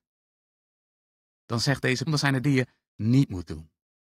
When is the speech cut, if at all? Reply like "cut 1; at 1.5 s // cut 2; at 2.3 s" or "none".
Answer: cut 1; at 2.1 s // cut 2; at 2.4 s